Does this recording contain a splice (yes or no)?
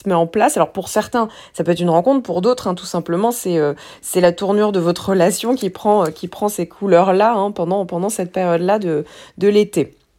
no